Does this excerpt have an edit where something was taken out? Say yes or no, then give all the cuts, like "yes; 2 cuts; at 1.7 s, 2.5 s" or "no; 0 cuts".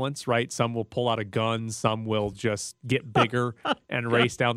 no; 0 cuts